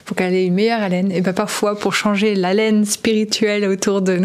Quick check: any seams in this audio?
no; 0 cuts

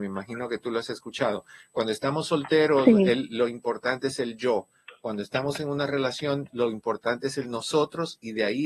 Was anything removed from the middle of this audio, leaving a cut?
no; 0 cuts

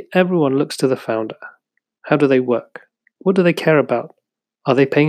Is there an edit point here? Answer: no; 0 cuts

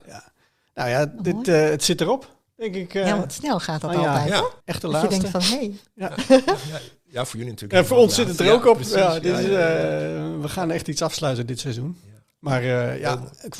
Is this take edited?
yes; 1 cut; at 4.6 s

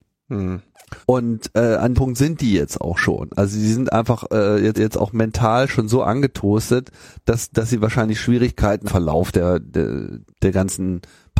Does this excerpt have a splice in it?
yes; 6 cuts; at 1.0 s, 1.9 s, 4.8 s, 7.5 s, 8.9 s, 10.3 s

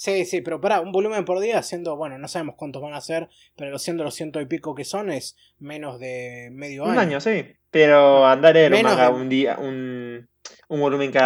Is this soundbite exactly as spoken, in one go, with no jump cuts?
yes; 0 cuts

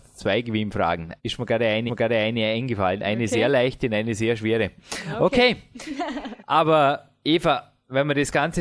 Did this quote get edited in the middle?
yes; 2 cuts; at 1.2 s, 1.9 s

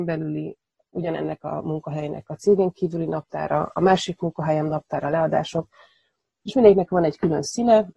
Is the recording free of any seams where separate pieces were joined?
yes; 0 cuts

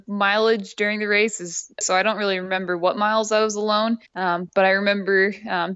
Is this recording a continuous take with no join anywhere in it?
no; 2 cuts; at 1.8 s, 4.1 s

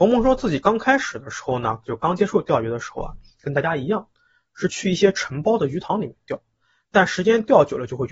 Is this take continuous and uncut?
yes; 0 cuts

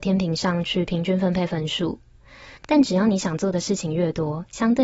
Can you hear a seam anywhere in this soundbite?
yes; 1 cut; at 2.6 s

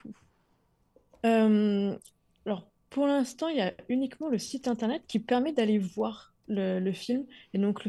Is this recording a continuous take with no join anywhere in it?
yes; 0 cuts

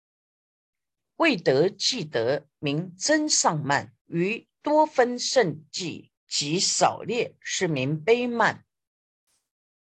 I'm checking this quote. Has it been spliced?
yes; 2 cuts; at 4.0 s, 6.2 s

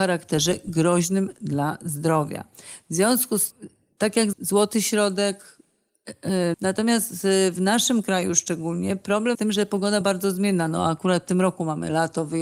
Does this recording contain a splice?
yes; 5 cuts; at 3.5 s, 4.3 s, 6.5 s, 9.3 s, 10.0 s

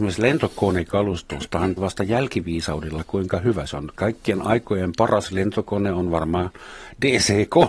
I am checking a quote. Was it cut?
yes; 1 cut; at 1.8 s

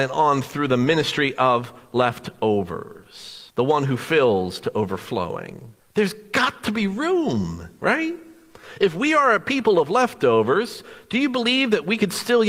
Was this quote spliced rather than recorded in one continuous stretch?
yes; 2 cuts; at 3.5 s, 5.8 s

